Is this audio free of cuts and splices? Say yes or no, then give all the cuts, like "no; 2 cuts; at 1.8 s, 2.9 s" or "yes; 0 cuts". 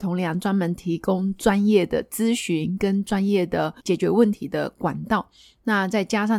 no; 1 cut; at 3.8 s